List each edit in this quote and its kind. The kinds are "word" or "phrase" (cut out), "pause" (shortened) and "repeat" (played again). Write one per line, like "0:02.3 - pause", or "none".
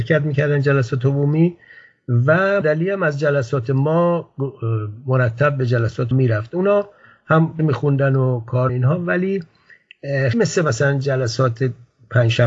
0:02.6 - word
0:06.1 - word
0:07.6 - word
0:08.7 - word
0:10.3 - word